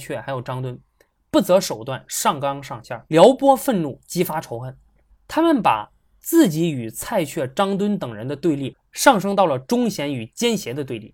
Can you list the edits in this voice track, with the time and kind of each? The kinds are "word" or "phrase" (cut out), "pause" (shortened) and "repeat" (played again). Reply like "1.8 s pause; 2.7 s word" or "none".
3.0 s pause; 5.1 s pause

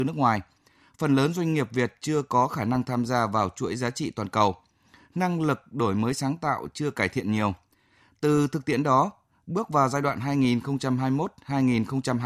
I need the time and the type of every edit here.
none

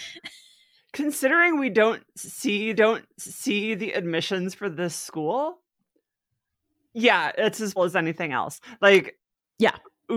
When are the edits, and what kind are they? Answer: 2.7 s repeat; 4.6 s word; 7.8 s word

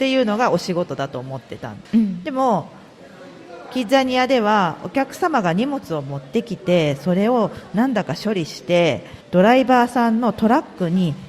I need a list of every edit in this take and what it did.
1.8 s pause; 9.2 s pause

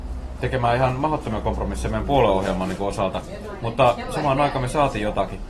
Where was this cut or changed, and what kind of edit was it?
none

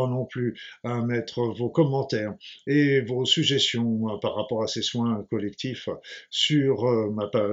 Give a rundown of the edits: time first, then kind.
none

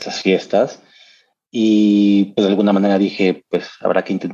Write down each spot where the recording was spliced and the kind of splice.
none

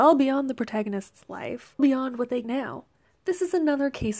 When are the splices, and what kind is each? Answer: 1.8 s word; 2.4 s phrase; 3.0 s pause

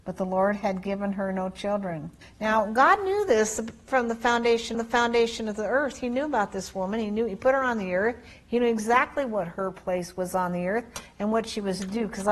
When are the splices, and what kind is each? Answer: 2.2 s pause; 4.7 s repeat

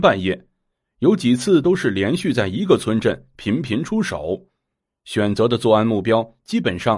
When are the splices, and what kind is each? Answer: none

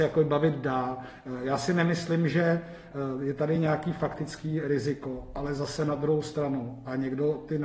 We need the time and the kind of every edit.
none

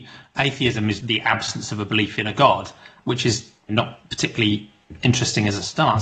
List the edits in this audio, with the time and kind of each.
1.0 s word

